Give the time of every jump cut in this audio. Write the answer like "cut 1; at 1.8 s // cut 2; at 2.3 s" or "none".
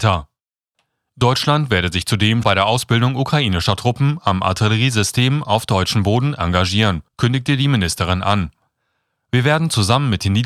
cut 1; at 2.4 s // cut 2; at 7.1 s